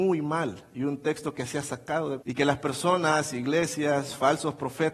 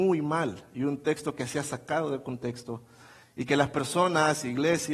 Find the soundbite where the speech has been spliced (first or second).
first